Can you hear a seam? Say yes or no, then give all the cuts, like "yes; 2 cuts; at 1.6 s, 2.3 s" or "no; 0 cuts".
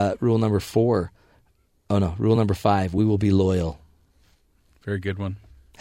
no; 0 cuts